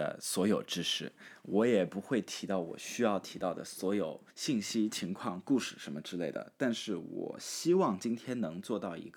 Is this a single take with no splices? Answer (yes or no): no